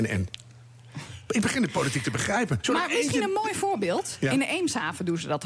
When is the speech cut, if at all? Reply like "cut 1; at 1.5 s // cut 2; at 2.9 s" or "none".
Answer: none